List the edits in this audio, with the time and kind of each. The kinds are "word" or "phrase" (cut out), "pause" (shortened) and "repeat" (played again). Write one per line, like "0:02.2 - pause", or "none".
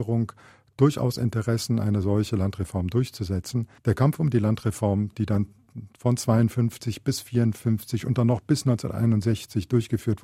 0:03.8 - pause